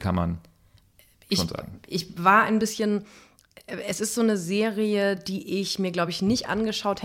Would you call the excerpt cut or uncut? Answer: uncut